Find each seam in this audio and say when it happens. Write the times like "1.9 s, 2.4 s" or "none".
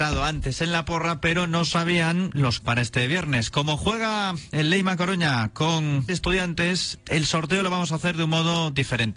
2.6 s, 6.1 s